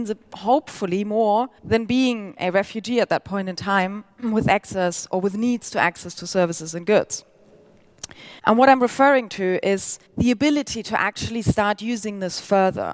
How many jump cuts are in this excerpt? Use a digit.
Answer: 4